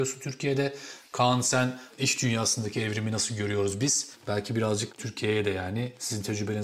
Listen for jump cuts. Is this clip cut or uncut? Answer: uncut